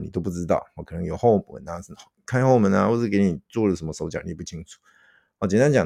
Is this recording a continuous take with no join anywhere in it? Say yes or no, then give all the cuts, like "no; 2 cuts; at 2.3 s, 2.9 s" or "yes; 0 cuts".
yes; 0 cuts